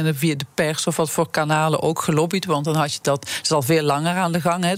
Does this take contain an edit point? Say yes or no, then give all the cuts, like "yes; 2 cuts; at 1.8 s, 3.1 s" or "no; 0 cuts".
no; 0 cuts